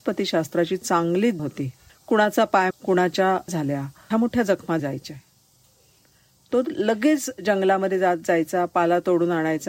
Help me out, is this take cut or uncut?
cut